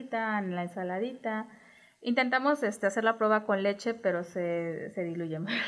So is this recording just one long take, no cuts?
yes; 0 cuts

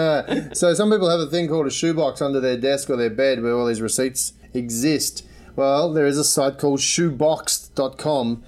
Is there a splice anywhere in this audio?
yes; 1 cut; at 4.4 s

